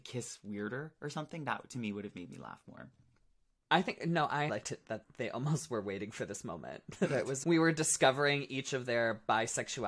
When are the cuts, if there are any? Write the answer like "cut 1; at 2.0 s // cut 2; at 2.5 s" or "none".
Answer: cut 1; at 4.5 s // cut 2; at 5.0 s // cut 3; at 7.4 s